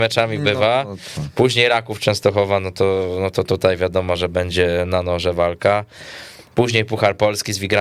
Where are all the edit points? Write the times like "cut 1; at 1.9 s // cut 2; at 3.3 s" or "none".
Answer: none